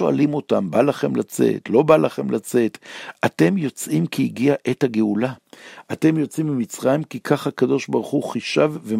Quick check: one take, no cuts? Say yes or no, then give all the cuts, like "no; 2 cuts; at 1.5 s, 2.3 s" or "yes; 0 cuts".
yes; 0 cuts